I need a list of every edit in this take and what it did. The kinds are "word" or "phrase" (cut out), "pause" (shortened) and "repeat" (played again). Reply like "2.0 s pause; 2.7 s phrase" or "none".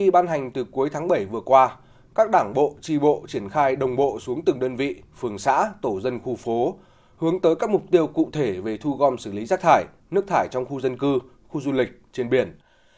none